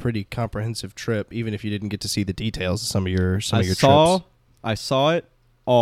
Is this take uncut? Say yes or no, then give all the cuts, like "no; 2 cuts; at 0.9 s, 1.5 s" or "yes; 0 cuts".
yes; 0 cuts